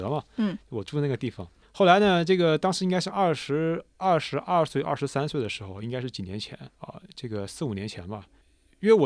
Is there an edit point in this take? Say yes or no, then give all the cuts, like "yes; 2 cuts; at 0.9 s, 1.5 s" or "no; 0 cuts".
yes; 2 cuts; at 1.6 s, 6.7 s